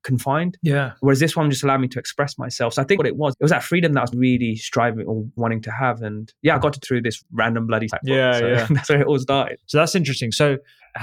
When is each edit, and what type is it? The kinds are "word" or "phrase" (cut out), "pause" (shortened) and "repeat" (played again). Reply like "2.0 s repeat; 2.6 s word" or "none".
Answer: 3.0 s word; 4.1 s word; 5.4 s word; 6.4 s pause; 6.8 s word; 7.2 s word; 7.9 s word